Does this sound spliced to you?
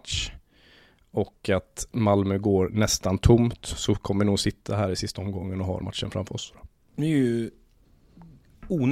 yes; 1 cut; at 5.8 s

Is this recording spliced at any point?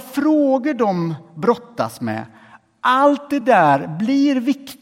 no; 0 cuts

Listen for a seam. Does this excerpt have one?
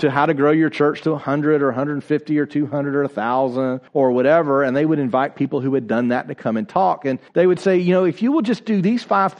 yes; 2 cuts; at 3.9 s, 7.3 s

